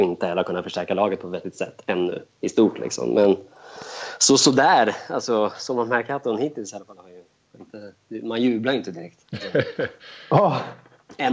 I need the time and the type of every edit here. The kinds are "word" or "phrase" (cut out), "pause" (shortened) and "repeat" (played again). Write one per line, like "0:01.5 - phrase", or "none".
0:02.3 - pause